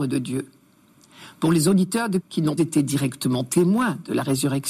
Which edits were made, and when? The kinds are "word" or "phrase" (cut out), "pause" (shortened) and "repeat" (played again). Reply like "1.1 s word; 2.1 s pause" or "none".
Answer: 2.2 s word; 2.6 s word